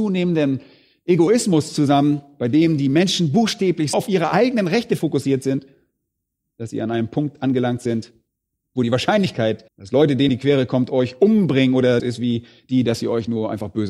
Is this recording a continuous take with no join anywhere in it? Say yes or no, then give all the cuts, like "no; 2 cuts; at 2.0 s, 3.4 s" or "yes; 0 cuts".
no; 5 cuts; at 3.9 s, 8.5 s, 9.7 s, 10.3 s, 12.0 s